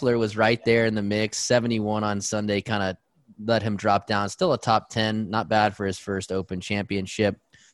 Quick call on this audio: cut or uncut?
uncut